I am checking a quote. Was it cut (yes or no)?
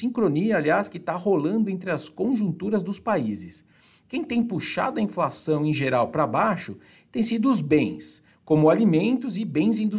no